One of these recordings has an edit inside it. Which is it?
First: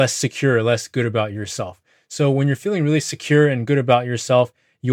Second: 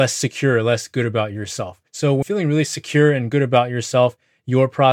second; 2 cuts; at 1.9 s, 2.2 s

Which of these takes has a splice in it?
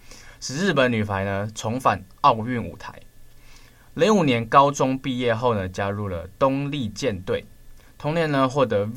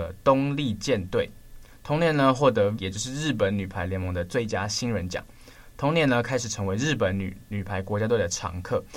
second; 1 cut; at 2.8 s

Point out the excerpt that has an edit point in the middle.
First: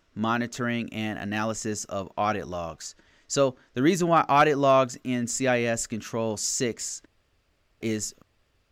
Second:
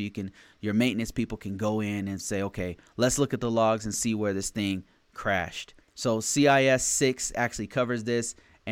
second; 1 cut; at 5.8 s

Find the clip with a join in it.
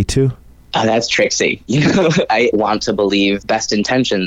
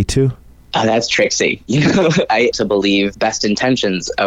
second; 1 cut; at 2.5 s

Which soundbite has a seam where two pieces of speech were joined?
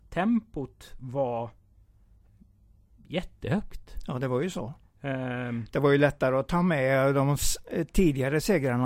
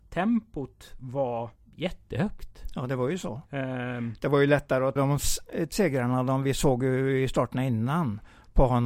second; 4 cuts; at 1.6 s, 3.5 s, 5.0 s, 5.7 s

